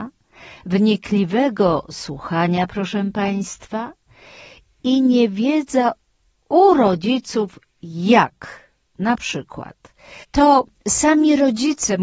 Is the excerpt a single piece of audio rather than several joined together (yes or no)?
yes